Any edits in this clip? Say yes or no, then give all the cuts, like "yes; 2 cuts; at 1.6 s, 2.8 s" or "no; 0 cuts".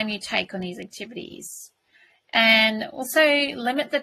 no; 0 cuts